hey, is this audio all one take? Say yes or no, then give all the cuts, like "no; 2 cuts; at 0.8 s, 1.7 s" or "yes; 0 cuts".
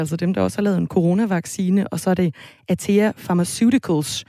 yes; 0 cuts